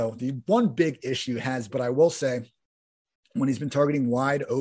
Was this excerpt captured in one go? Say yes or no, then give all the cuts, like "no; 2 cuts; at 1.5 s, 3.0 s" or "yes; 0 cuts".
no; 1 cut; at 1.7 s